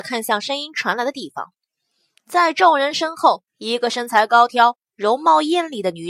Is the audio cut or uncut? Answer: cut